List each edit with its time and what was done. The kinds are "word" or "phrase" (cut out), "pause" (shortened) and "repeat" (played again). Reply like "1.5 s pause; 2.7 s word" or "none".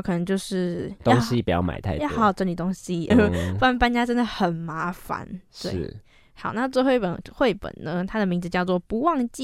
3.1 s word